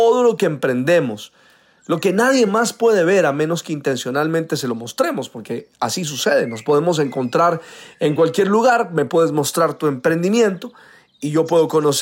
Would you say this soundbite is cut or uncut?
uncut